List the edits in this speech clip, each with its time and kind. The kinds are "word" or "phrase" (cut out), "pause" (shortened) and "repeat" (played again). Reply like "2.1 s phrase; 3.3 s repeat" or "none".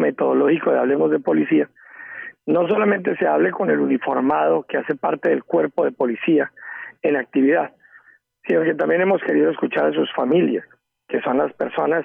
none